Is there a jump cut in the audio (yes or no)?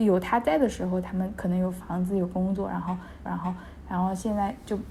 yes